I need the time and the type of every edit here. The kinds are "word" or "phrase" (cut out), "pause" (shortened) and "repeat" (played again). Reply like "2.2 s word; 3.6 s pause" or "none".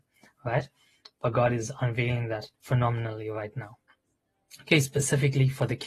2.5 s pause